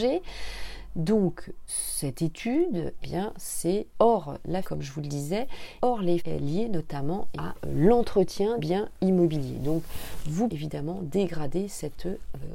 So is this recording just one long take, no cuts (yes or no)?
no